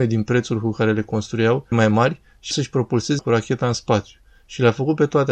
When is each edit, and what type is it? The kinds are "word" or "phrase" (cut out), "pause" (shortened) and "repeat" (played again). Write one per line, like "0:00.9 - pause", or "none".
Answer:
0:01.7 - word
0:02.5 - word
0:03.2 - word